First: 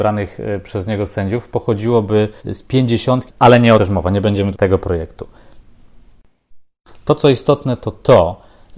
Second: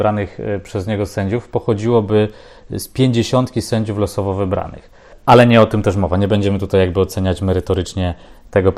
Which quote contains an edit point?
first; 4 cuts; at 2.4 s, 3.3 s, 3.8 s, 4.5 s

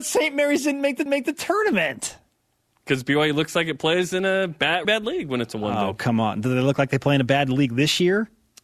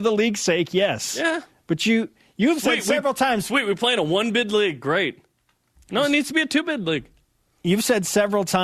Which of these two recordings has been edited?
first; 2 cuts; at 1.1 s, 4.8 s

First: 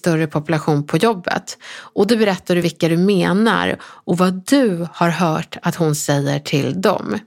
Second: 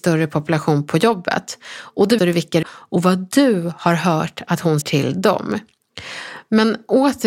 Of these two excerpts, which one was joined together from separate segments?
second; 3 cuts; at 2.2 s, 2.6 s, 4.8 s

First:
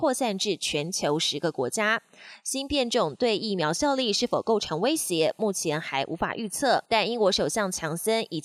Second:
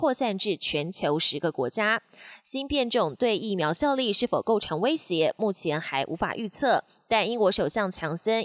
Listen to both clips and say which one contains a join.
first; 1 cut; at 6.9 s

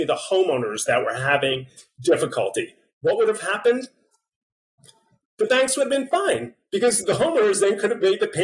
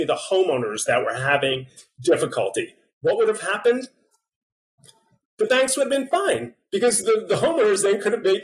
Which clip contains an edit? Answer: first; 1 cut; at 7.0 s

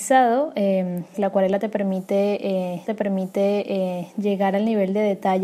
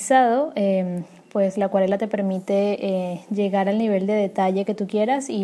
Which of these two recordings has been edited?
first; 2 cuts; at 1.1 s, 2.9 s

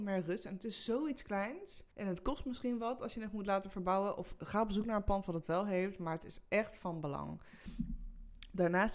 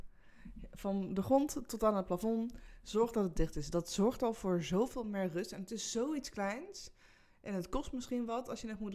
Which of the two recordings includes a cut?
first; 1 cut; at 1.9 s

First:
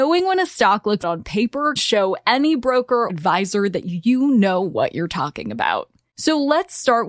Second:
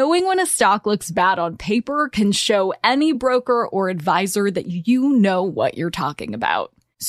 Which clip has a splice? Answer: first; 3 cuts; at 1.0 s, 1.8 s, 3.1 s

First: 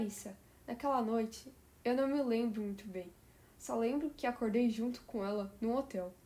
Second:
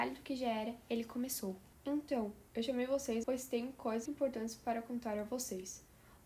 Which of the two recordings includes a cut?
second; 2 cuts; at 3.2 s, 4.1 s

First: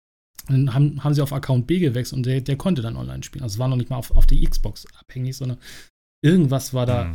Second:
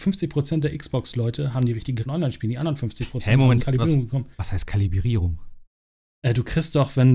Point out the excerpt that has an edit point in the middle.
second; 3 cuts; at 2.1 s, 3.6 s, 4.3 s

